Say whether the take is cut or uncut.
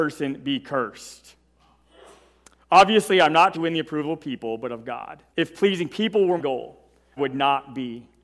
cut